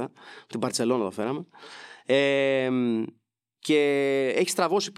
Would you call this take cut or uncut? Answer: uncut